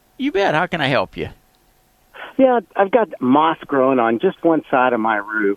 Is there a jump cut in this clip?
yes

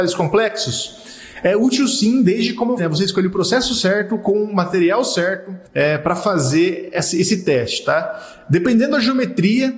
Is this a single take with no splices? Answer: no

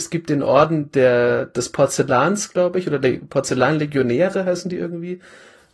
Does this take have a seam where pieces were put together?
no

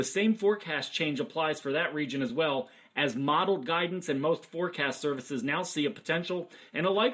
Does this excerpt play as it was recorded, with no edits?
yes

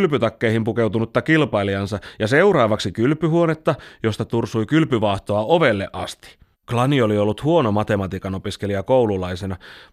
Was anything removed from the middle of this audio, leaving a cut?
yes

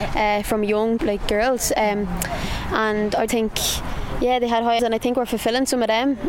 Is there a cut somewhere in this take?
yes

